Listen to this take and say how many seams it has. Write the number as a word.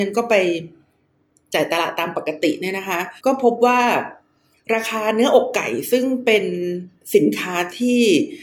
one